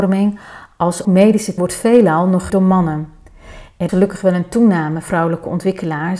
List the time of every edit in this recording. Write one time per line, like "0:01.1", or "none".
0:01.0
0:01.6
0:02.5
0:03.9
0:05.0